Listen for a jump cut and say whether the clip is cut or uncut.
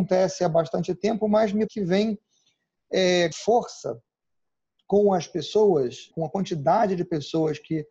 cut